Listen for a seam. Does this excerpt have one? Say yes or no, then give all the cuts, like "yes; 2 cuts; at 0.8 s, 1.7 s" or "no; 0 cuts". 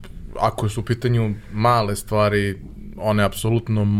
no; 0 cuts